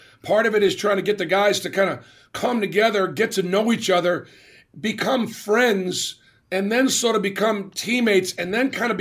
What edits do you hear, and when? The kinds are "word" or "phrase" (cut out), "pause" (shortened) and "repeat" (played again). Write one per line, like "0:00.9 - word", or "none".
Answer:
none

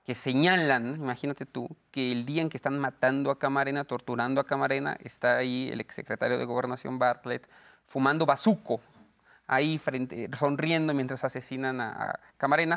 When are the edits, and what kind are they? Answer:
none

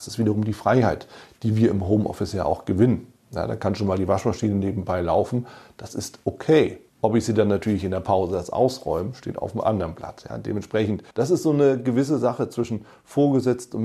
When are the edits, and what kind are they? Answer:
0:06.9 - pause
0:11.1 - pause

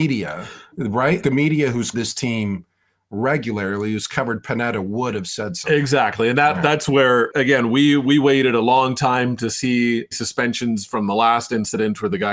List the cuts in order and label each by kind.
0:01.2 - word
0:01.9 - word
0:07.3 - word
0:10.1 - word

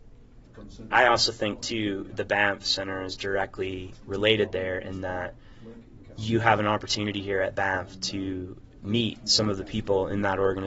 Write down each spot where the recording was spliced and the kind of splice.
none

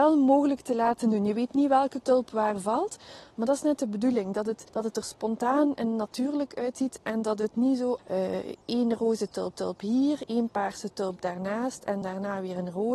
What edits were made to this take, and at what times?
0:02.0 - word
0:04.7 - pause
0:08.0 - word
0:08.6 - pause
0:09.5 - repeat
0:12.0 - word

